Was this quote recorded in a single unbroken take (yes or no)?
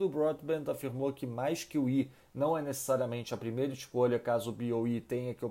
yes